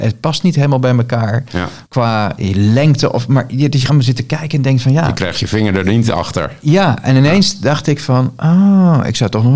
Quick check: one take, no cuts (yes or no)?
no